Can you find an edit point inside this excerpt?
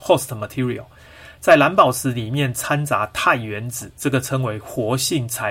no; 0 cuts

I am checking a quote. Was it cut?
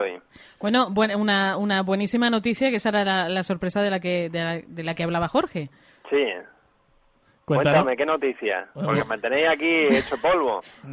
no; 0 cuts

